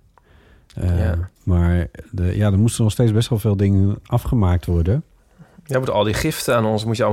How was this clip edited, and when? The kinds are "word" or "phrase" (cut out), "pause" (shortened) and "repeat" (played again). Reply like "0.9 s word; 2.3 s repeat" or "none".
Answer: none